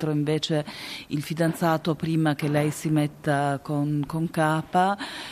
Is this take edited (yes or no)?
no